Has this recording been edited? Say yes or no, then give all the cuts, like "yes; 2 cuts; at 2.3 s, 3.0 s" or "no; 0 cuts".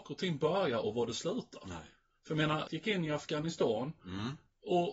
yes; 1 cut; at 2.7 s